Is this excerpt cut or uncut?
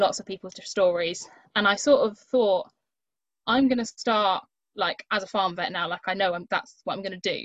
uncut